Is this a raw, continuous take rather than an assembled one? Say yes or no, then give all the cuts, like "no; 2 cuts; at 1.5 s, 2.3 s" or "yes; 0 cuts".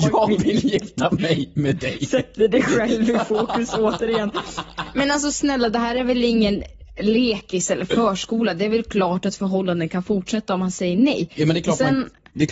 yes; 0 cuts